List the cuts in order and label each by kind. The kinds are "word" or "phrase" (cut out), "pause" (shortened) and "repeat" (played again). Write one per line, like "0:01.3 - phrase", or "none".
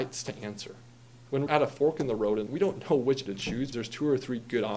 0:01.5 - word
0:02.5 - word
0:03.3 - word
0:03.7 - word